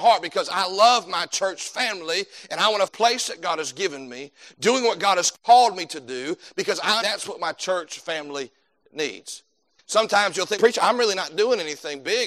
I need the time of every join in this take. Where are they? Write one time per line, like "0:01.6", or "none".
0:02.9
0:07.0
0:10.6